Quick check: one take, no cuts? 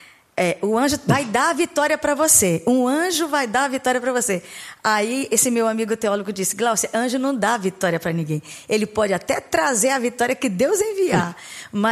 yes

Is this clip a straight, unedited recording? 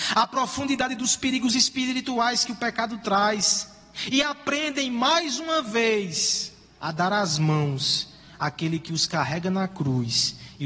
yes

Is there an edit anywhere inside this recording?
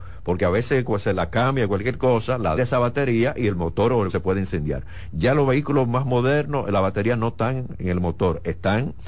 yes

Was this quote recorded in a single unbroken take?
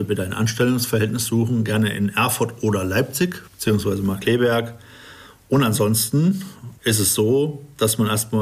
no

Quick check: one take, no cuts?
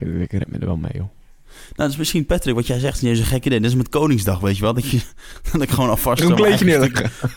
yes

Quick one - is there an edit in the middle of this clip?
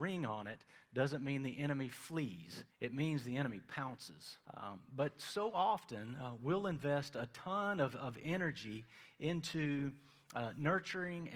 yes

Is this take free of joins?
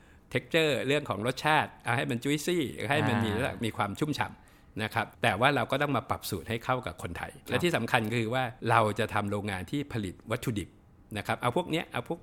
no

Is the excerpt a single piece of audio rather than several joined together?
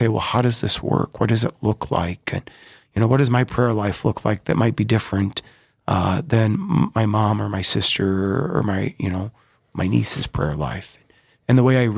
yes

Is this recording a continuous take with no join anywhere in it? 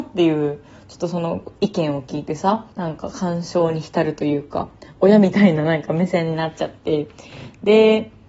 no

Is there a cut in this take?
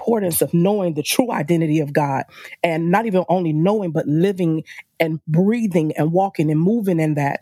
no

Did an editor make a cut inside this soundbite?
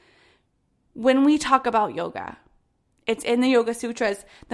no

